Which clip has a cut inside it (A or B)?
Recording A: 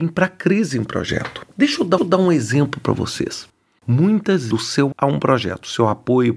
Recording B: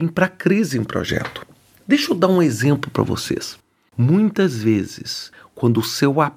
A